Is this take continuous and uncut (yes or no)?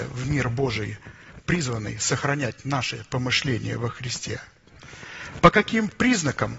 yes